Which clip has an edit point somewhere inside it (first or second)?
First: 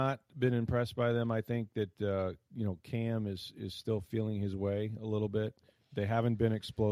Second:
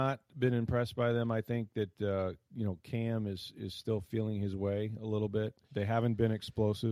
second